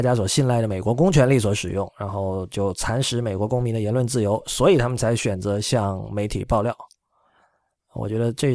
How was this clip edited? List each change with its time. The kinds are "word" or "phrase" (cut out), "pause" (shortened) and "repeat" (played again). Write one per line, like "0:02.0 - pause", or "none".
none